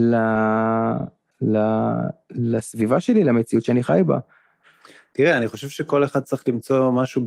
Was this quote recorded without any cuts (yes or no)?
yes